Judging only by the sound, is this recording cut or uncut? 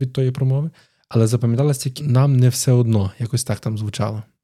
cut